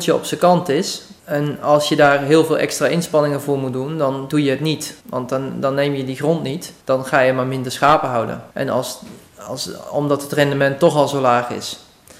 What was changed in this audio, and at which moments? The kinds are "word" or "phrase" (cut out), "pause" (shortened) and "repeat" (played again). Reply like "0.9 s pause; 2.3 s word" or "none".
1.2 s pause; 5.0 s pause; 6.8 s pause; 8.5 s pause